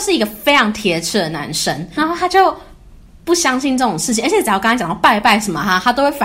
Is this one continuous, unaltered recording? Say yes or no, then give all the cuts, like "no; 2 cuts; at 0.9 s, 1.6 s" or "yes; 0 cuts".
no; 1 cut; at 2.0 s